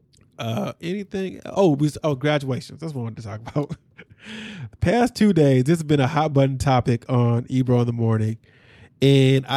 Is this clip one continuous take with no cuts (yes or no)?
yes